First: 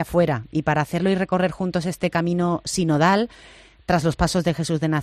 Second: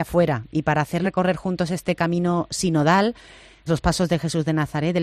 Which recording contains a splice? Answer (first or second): second